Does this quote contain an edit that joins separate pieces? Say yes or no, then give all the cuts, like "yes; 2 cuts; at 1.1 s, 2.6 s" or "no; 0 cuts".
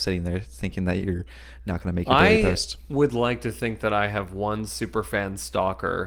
no; 0 cuts